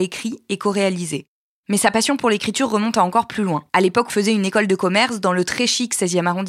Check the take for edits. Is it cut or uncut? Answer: cut